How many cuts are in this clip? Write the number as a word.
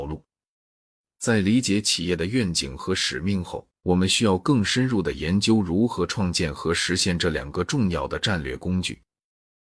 one